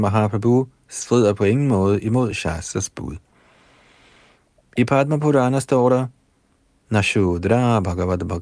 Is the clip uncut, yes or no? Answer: yes